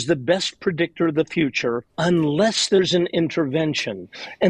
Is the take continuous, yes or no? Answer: no